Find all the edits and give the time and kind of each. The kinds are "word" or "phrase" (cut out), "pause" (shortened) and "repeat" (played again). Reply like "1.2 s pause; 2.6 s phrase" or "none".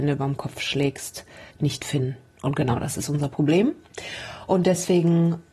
1.5 s pause